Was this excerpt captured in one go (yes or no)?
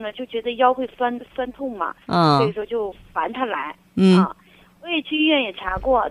yes